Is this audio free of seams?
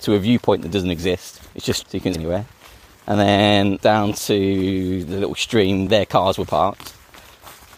no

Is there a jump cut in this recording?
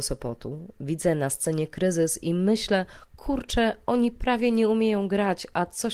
no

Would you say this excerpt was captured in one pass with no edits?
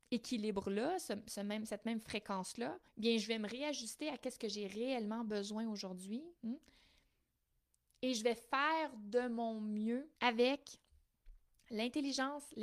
no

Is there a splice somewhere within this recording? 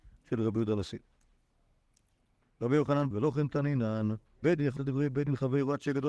yes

